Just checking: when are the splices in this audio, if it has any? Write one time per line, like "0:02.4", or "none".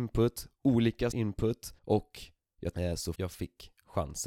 0:01.1
0:01.8
0:02.7
0:03.1